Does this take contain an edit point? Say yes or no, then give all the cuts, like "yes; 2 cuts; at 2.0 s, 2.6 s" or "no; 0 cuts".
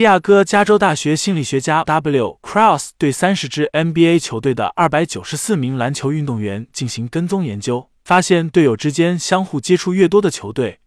yes; 1 cut; at 1.8 s